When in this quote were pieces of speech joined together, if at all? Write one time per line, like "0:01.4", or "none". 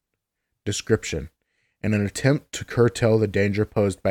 none